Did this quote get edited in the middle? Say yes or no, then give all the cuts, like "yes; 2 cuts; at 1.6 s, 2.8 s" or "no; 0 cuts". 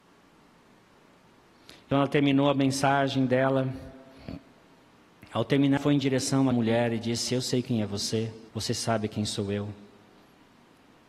yes; 4 cuts; at 1.9 s, 5.8 s, 6.5 s, 8.5 s